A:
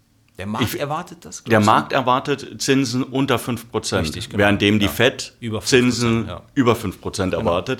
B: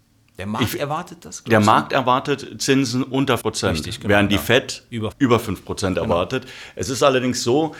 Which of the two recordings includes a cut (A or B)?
B